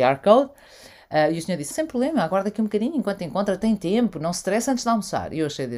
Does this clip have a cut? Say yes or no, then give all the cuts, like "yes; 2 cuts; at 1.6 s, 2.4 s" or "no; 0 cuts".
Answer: yes; 1 cut; at 1.7 s